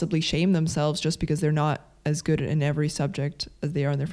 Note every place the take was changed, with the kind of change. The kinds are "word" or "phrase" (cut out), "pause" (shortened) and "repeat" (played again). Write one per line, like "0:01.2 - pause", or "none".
none